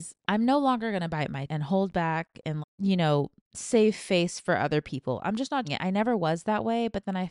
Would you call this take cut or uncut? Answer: cut